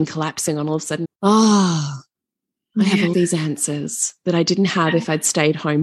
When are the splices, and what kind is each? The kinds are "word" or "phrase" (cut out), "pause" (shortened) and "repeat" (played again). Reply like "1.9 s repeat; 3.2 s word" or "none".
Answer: 1.0 s phrase; 3.1 s word